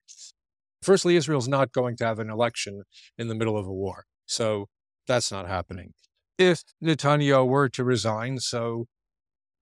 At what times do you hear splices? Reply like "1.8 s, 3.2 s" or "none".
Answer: 6.7 s